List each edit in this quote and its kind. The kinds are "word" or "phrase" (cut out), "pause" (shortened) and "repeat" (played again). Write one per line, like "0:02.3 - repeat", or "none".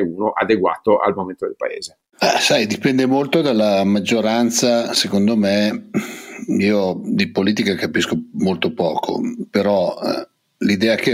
none

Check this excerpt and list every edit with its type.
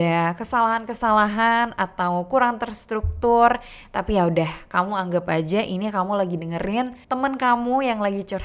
0:07.0 - pause

